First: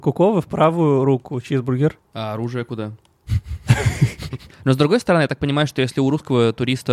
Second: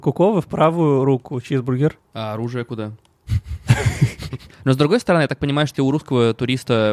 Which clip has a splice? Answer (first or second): second